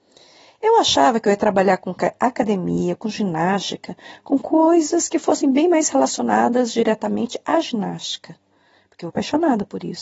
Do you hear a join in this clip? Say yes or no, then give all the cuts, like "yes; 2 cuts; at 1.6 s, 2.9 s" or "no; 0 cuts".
yes; 1 cut; at 9.1 s